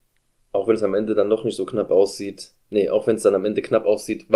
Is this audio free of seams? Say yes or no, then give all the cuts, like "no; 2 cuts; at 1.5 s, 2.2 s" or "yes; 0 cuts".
no; 1 cut; at 2.6 s